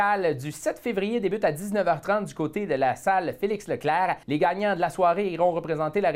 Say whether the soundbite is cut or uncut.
cut